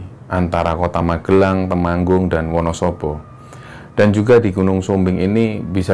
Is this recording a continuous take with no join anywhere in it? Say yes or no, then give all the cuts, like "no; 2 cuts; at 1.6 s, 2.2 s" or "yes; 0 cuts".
yes; 0 cuts